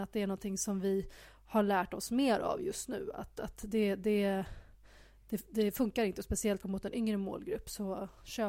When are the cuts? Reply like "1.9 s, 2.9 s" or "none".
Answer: 6.6 s